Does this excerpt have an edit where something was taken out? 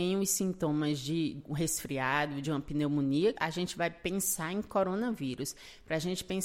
yes; 2 cuts; at 2.4 s, 3.3 s

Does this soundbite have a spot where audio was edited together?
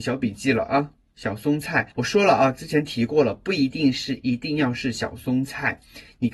yes; 1 cut; at 1.9 s

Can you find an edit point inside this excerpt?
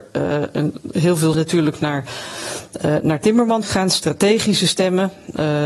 yes; 2 cuts; at 1.3 s, 3.6 s

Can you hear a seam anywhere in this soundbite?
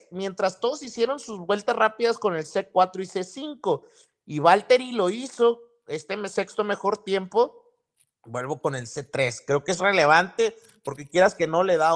yes; 1 cut; at 9.8 s

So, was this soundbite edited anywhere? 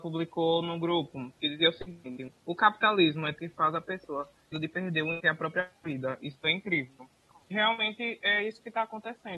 yes; 4 cuts; at 2.4 s, 3.4 s, 4.5 s, 5.2 s

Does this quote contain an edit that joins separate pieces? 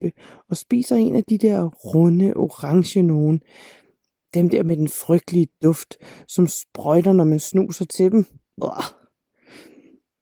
no; 0 cuts

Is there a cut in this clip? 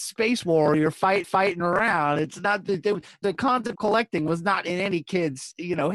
yes; 3 cuts; at 1.2 s, 3.2 s, 3.8 s

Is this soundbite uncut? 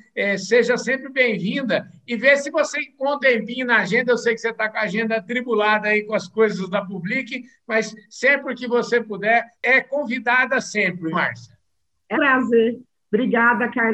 no; 4 cuts; at 3.2 s, 9.5 s, 11.1 s, 12.1 s

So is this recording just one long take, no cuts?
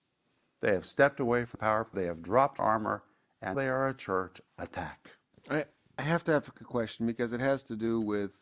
no; 6 cuts; at 1.6 s, 1.9 s, 2.6 s, 3.5 s, 4.5 s, 6.6 s

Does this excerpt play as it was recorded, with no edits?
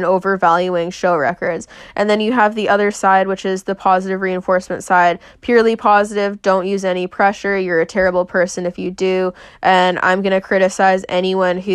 yes; 0 cuts

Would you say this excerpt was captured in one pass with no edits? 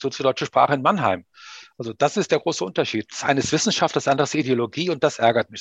yes; 0 cuts

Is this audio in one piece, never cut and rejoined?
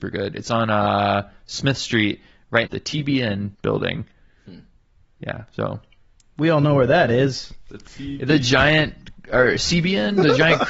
no; 2 cuts; at 2.7 s, 3.5 s

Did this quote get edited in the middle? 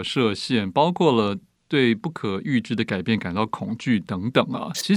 no; 0 cuts

